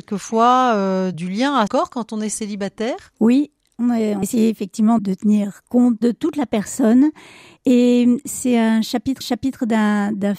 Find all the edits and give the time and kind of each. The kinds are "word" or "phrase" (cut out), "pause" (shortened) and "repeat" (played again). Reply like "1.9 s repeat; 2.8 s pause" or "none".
1.7 s word; 4.2 s word; 5.0 s word; 9.2 s repeat